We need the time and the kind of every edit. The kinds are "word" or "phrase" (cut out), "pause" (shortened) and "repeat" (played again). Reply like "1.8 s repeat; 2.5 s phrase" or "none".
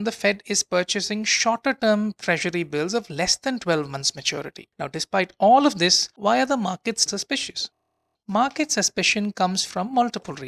7.1 s word